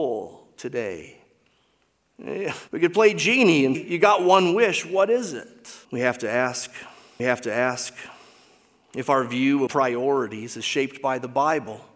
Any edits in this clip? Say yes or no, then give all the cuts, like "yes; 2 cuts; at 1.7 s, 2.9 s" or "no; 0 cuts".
yes; 5 cuts; at 2.7 s, 3.7 s, 5.8 s, 7.2 s, 9.7 s